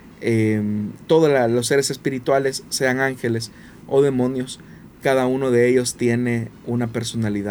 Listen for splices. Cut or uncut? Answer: uncut